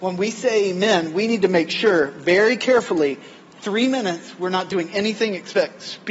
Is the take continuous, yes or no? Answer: yes